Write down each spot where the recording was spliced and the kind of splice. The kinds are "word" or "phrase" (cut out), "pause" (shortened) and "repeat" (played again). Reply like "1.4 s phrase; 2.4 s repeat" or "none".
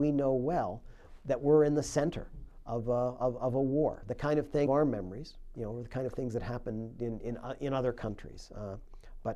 3.4 s word; 4.7 s phrase; 5.5 s word